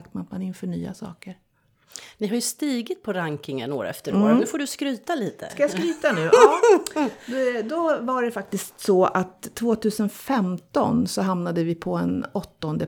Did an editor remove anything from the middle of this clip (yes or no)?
no